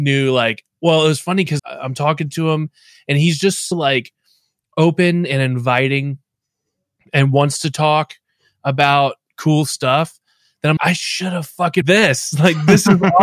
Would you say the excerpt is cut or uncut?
cut